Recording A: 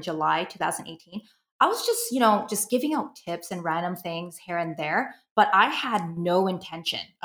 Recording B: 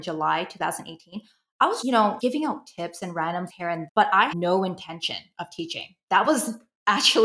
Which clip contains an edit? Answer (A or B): B